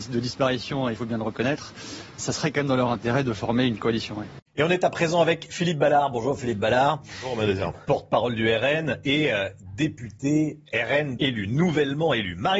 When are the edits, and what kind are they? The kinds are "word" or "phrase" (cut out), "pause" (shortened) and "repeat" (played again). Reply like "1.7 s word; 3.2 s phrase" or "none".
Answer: 2.2 s word; 4.5 s pause; 11.2 s phrase